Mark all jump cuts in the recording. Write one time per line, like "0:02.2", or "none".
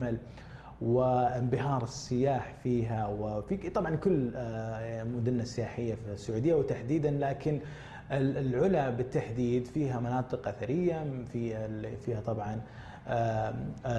none